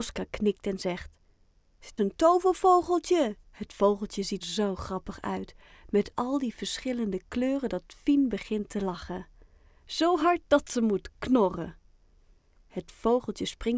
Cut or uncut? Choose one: cut